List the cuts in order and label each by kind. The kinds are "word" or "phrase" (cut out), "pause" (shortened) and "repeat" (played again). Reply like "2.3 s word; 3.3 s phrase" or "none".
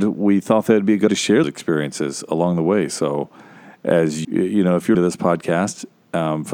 1.1 s word; 1.4 s word; 4.2 s word; 4.9 s word